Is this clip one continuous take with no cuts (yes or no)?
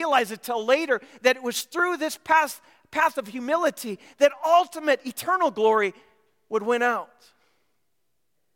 yes